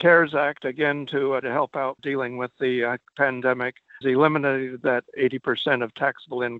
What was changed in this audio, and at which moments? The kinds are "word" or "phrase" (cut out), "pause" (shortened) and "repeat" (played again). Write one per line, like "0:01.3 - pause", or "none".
0:01.4 - word
0:02.0 - word
0:04.0 - word